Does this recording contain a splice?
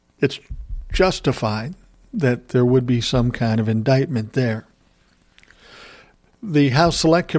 no; 0 cuts

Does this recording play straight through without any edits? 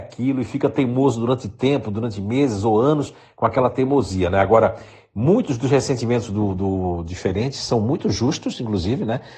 yes; 0 cuts

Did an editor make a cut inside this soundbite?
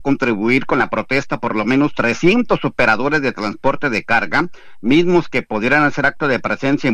no; 0 cuts

